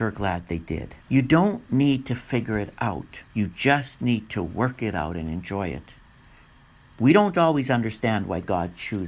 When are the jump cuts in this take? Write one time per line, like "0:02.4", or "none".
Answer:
0:01.0
0:03.3